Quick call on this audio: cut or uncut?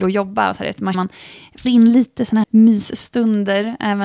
cut